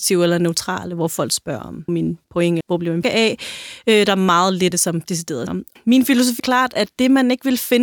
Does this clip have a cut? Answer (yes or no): yes